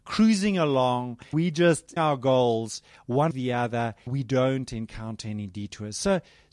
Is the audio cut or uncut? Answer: cut